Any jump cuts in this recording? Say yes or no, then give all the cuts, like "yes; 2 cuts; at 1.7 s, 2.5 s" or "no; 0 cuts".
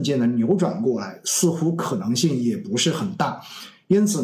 no; 0 cuts